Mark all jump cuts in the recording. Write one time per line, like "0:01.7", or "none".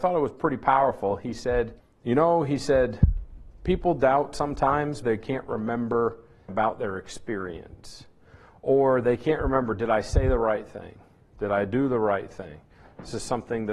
0:01.8
0:05.0
0:06.5